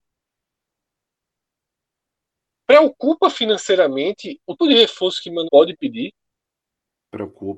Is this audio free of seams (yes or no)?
no